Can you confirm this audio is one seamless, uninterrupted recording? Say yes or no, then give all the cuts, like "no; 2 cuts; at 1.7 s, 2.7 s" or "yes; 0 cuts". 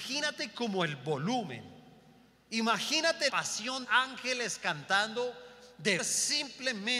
no; 3 cuts; at 3.3 s, 3.8 s, 6.0 s